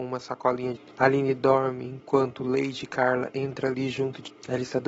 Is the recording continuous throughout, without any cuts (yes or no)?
yes